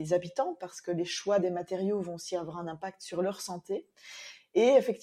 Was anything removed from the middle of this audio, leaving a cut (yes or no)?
no